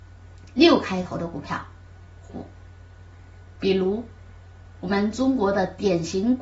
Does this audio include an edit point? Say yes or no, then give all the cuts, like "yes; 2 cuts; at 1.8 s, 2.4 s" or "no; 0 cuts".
yes; 1 cut; at 2.3 s